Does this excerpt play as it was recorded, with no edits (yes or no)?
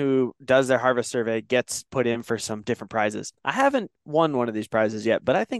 no